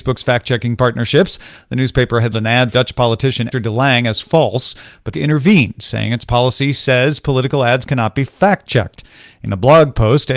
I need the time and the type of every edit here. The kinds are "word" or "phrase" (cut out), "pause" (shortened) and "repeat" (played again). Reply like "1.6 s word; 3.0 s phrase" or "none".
2.3 s word; 2.7 s word; 3.5 s word; 5.1 s word